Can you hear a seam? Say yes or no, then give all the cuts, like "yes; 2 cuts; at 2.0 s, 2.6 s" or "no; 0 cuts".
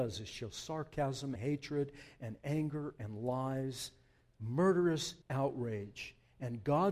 yes; 2 cuts; at 1.4 s, 5.2 s